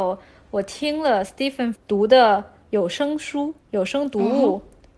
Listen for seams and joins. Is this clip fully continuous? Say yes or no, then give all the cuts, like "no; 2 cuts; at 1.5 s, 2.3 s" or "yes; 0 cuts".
no; 2 cuts; at 1.7 s, 3.6 s